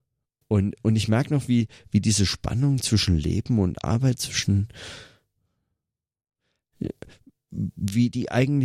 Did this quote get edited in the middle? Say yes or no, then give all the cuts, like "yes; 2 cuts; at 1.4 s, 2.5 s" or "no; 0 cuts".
no; 0 cuts